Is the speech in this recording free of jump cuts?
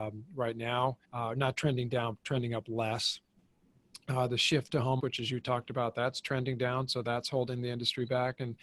no; 3 cuts; at 1.0 s, 2.1 s, 5.0 s

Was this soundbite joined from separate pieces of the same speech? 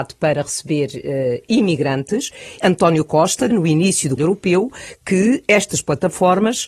yes; 3 cuts; at 2.6 s, 3.5 s, 4.2 s

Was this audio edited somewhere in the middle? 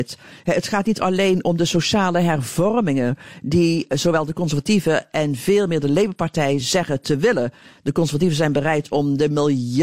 no; 0 cuts

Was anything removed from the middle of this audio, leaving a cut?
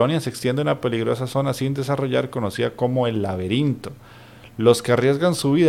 no; 0 cuts

